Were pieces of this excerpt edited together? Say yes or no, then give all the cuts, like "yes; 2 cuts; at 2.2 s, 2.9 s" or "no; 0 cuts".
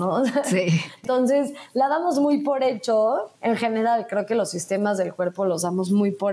yes; 1 cut; at 3.4 s